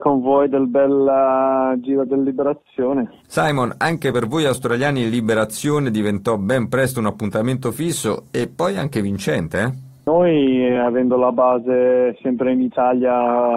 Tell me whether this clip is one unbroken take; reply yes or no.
yes